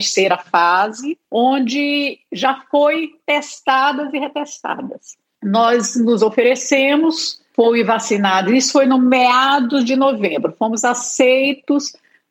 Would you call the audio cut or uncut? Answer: cut